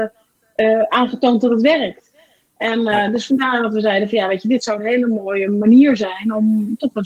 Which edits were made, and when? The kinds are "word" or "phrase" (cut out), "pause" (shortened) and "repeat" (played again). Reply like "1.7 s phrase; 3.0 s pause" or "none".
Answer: none